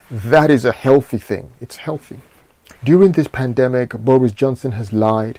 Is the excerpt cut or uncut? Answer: cut